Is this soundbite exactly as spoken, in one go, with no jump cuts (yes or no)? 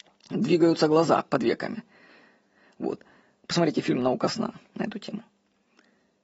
yes